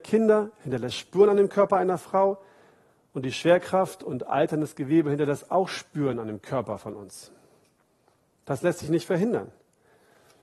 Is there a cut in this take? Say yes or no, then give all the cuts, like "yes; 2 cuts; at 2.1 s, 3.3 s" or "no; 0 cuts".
no; 0 cuts